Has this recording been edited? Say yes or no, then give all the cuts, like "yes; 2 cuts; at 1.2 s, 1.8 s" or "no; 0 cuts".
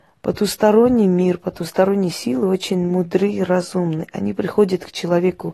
no; 0 cuts